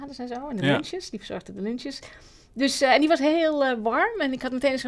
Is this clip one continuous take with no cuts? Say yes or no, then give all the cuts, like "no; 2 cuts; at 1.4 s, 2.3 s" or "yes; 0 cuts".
yes; 0 cuts